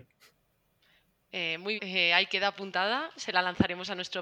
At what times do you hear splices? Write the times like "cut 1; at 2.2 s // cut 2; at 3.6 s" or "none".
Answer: cut 1; at 1.8 s